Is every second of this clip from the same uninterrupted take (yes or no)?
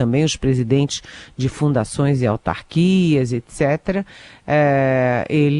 yes